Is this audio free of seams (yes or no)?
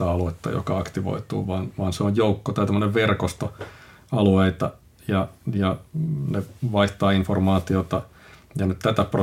yes